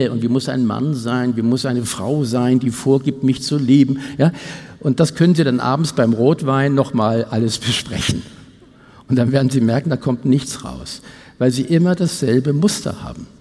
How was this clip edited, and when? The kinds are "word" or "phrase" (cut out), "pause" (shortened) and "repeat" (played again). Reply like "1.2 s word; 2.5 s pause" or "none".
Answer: none